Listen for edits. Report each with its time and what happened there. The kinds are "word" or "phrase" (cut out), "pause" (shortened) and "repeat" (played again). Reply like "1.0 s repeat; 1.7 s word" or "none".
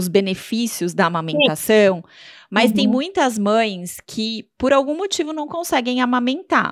none